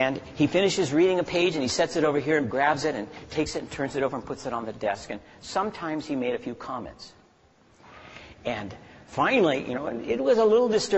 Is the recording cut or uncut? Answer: cut